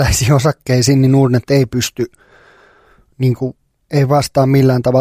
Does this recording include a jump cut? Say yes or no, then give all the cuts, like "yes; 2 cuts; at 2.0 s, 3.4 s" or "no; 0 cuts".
no; 0 cuts